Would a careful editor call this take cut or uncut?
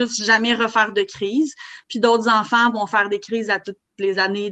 uncut